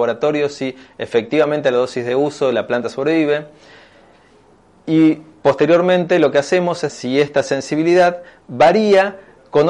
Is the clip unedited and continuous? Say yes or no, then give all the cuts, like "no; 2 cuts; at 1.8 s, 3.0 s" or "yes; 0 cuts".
no; 1 cut; at 6.9 s